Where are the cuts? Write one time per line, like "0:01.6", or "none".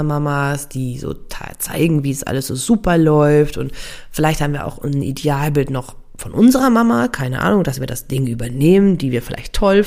none